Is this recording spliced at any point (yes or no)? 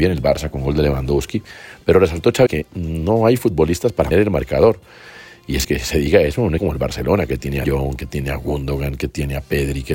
yes